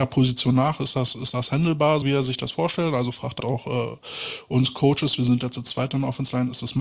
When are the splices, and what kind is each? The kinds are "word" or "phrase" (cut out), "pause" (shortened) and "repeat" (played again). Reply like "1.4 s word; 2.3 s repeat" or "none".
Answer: 2.0 s word; 3.4 s word